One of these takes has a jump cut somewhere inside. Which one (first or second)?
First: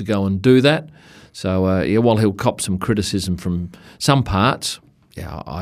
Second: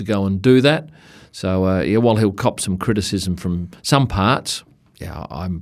second